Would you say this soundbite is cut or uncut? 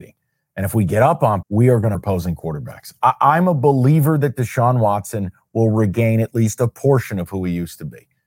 cut